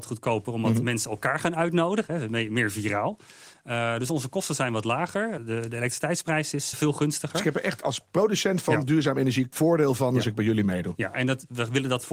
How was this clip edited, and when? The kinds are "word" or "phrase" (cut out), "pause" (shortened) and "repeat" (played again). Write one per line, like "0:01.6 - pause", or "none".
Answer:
0:05.4 - word
0:06.7 - word
0:07.8 - word
0:09.5 - word